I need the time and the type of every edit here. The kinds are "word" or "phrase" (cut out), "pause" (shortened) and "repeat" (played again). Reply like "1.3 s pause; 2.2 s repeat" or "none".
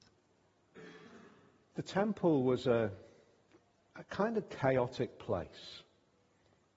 none